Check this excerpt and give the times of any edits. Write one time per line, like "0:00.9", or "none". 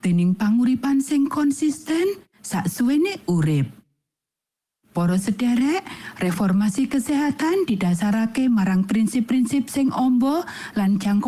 none